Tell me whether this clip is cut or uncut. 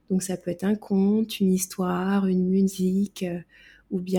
uncut